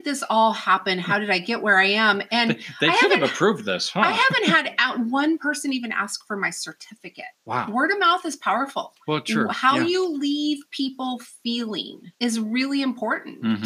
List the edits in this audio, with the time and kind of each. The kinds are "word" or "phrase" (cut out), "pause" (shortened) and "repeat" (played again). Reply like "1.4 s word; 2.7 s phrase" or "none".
12.2 s pause